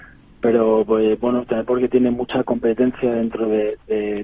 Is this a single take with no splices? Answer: yes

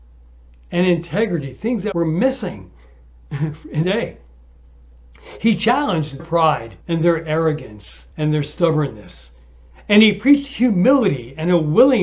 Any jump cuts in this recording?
yes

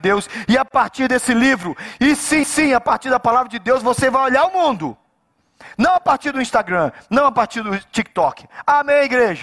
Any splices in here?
yes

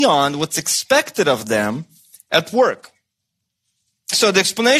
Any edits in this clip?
no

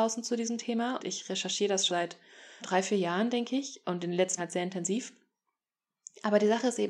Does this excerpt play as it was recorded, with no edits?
no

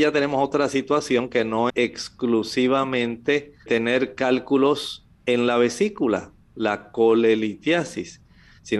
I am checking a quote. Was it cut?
yes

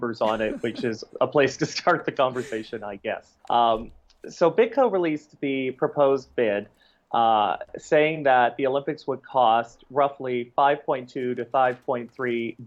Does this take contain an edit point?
yes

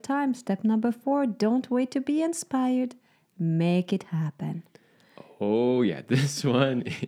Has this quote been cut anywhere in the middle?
no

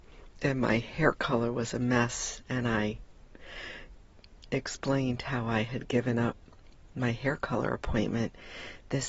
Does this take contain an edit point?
no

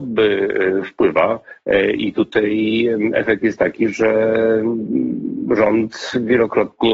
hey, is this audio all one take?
yes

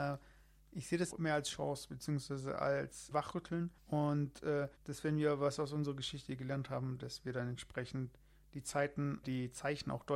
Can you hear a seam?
yes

